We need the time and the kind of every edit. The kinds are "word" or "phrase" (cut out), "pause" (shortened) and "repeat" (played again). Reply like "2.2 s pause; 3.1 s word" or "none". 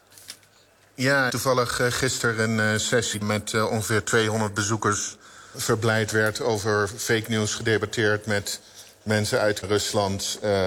1.3 s phrase; 3.2 s word; 5.5 s word; 9.6 s word